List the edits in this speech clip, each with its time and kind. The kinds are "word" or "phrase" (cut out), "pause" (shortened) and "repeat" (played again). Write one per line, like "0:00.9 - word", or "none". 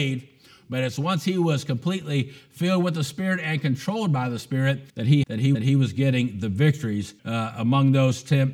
0:04.9 - pause
0:05.2 - phrase
0:05.5 - repeat
0:07.2 - pause